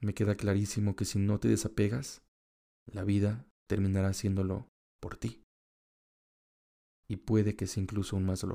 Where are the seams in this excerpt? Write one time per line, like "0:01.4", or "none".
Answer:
none